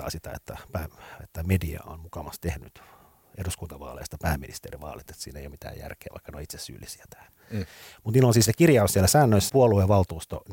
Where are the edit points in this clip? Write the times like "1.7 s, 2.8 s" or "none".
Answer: 9.5 s